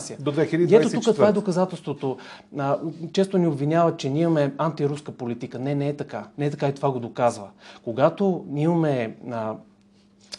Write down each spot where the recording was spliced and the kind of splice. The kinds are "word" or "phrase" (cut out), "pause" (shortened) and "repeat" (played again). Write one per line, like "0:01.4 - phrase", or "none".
0:06.3 - pause